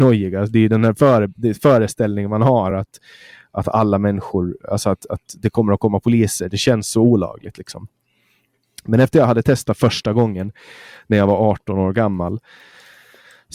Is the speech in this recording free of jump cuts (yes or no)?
yes